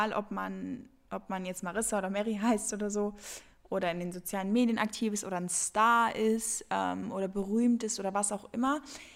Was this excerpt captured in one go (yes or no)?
yes